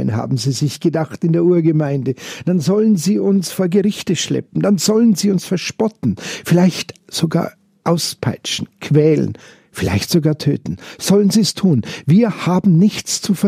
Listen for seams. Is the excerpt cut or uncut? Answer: uncut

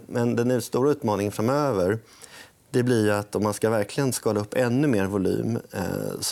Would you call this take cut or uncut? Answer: uncut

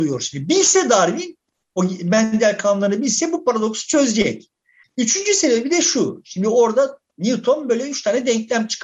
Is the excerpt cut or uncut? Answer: uncut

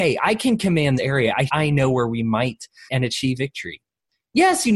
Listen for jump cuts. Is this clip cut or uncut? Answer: cut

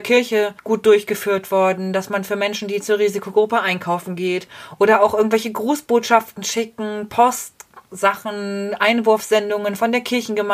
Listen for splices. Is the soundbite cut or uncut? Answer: uncut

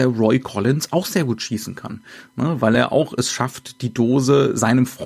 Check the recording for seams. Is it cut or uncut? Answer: uncut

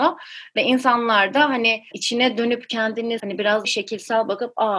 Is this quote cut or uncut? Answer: cut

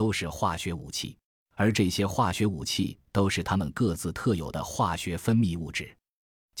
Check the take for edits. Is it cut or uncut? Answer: cut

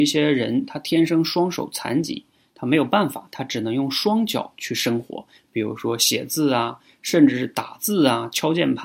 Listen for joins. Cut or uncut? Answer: uncut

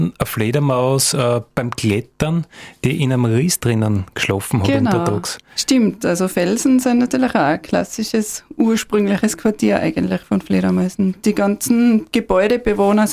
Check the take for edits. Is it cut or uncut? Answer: uncut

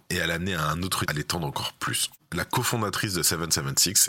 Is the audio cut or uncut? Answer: cut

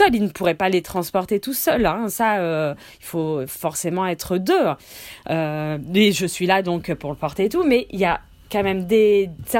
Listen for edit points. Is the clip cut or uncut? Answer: uncut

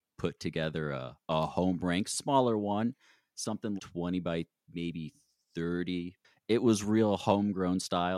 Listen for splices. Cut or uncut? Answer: cut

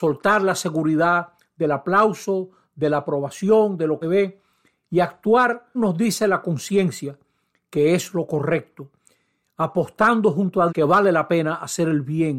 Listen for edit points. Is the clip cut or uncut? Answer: cut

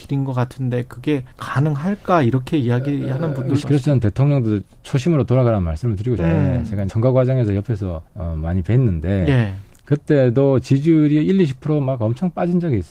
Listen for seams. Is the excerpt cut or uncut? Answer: cut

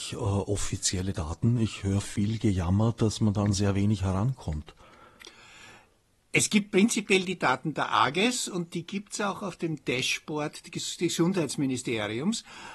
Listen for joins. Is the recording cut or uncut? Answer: uncut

